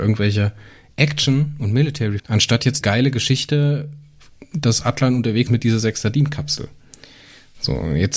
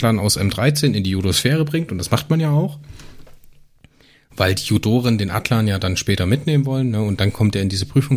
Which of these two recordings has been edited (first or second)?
first